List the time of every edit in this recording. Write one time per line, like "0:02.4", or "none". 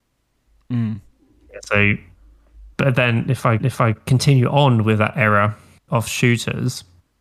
0:02.7
0:03.6
0:05.9